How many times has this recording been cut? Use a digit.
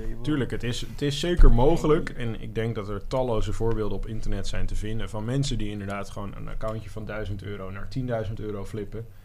0